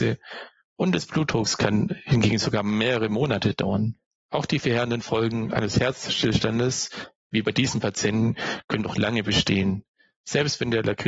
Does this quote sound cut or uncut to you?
uncut